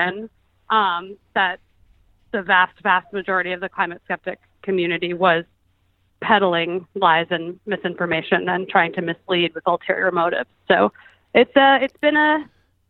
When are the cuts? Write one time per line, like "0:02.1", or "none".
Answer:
none